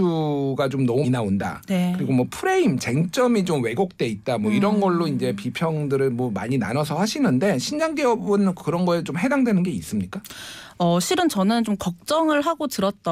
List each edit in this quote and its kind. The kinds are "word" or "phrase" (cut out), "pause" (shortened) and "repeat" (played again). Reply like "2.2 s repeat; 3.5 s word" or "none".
1.0 s word